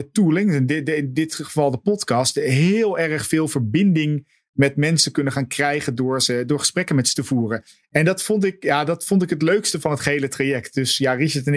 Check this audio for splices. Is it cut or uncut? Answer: uncut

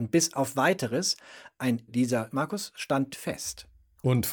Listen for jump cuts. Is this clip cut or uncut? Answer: cut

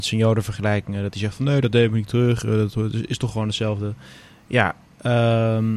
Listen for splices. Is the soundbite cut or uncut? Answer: uncut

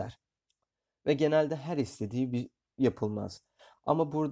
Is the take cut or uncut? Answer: uncut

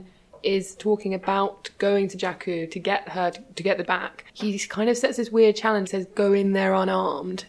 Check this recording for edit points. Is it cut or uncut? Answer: cut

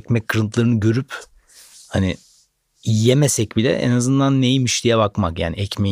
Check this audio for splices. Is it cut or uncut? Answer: uncut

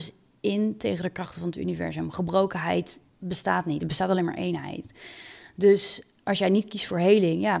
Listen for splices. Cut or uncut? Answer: uncut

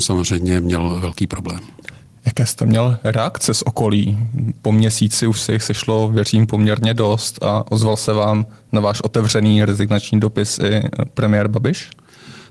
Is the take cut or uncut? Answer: uncut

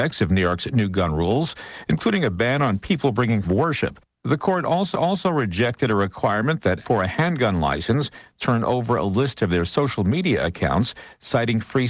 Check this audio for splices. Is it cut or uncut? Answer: cut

